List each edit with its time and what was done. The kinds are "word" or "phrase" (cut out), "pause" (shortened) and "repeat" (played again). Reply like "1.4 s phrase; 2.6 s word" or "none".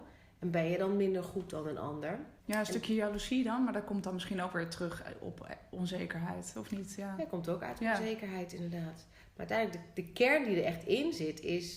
2.4 s pause